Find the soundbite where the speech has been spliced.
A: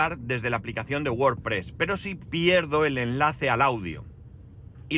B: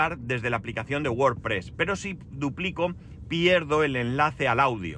A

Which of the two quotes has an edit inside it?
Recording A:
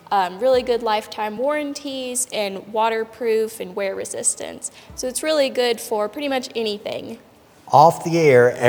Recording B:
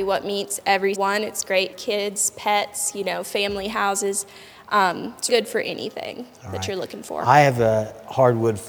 B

